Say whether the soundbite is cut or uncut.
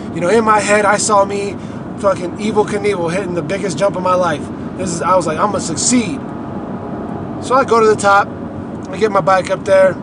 cut